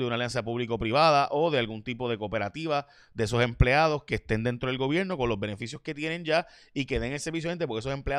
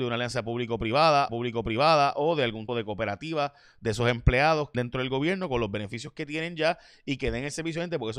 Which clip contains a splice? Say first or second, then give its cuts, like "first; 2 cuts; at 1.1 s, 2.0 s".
second; 3 cuts; at 1.3 s, 2.7 s, 4.7 s